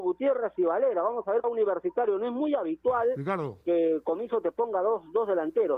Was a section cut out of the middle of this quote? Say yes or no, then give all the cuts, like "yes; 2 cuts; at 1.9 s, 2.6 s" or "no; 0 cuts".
yes; 1 cut; at 1.4 s